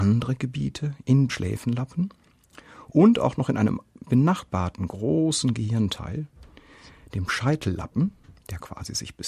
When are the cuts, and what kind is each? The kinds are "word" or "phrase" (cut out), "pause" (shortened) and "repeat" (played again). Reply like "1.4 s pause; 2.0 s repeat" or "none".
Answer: 1.3 s word